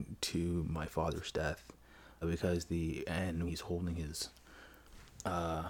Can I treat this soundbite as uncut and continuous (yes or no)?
no